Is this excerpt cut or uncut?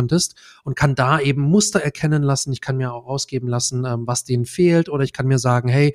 uncut